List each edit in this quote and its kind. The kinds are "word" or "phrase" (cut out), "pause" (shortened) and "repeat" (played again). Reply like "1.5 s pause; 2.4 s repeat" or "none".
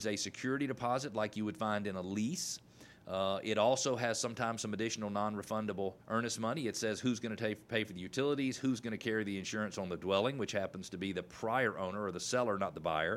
6.0 s pause